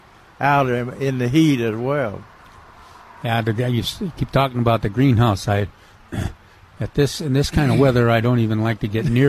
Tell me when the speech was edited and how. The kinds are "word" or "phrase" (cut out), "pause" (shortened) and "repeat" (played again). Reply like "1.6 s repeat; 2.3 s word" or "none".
none